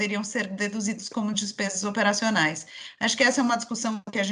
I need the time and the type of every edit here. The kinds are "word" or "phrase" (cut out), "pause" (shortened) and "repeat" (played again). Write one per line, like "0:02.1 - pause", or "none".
none